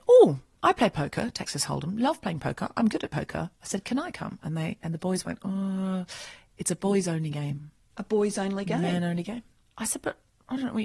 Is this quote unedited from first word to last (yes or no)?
yes